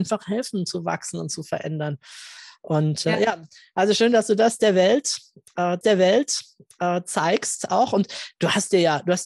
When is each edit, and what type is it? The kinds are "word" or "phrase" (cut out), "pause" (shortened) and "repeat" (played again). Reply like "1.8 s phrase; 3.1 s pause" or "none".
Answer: 5.8 s repeat